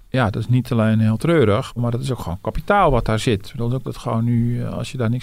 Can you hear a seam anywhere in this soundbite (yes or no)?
yes